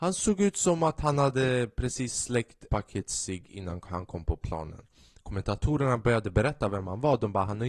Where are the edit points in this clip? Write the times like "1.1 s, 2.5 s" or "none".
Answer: 2.7 s